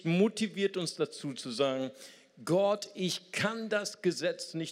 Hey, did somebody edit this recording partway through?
no; 0 cuts

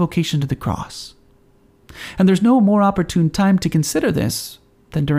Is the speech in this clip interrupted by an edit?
no; 0 cuts

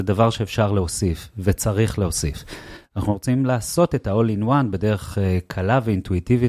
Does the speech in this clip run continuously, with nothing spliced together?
yes; 0 cuts

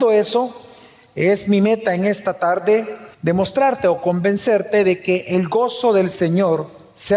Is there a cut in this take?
yes; 1 cut; at 3.1 s

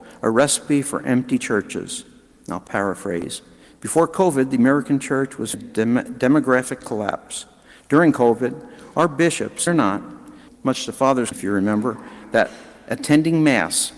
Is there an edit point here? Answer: yes; 4 cuts; at 5.5 s, 9.7 s, 10.5 s, 11.3 s

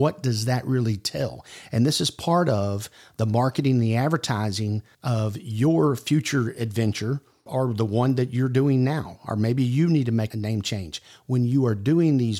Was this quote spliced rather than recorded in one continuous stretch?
no; 0 cuts

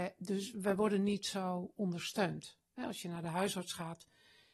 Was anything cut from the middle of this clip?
no; 0 cuts

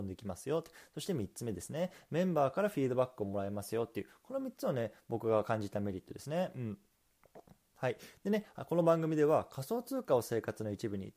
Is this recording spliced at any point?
no; 0 cuts

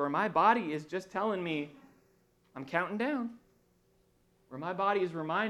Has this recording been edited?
no; 0 cuts

